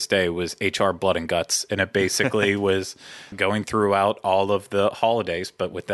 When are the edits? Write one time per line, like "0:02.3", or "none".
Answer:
0:03.3